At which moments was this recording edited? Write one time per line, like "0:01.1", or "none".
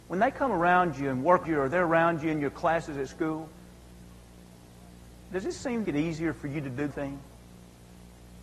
0:01.4
0:05.8
0:06.9

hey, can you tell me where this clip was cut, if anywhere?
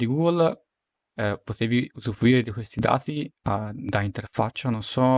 none

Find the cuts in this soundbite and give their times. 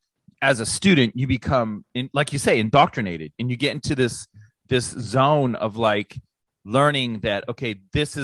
none

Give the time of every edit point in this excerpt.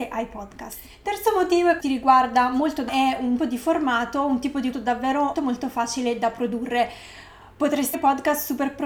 0:01.8
0:02.9
0:03.4
0:04.7
0:05.3
0:07.9

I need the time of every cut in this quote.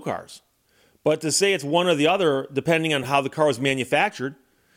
none

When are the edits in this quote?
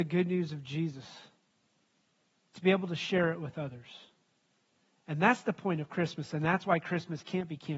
none

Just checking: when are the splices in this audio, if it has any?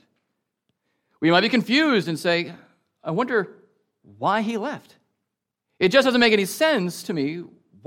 none

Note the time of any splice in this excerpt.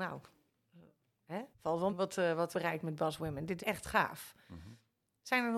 0:01.5
0:01.9
0:02.5
0:03.6

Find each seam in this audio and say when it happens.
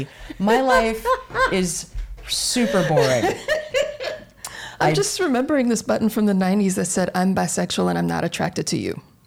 none

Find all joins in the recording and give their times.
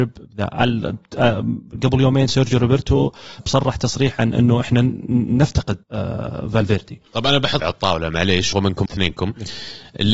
0:03.4
0:05.8
0:07.6
0:08.5
0:08.9

